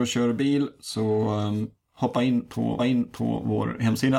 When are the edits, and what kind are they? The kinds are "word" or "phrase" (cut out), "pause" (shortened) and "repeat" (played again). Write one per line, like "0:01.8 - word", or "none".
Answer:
0:02.8 - repeat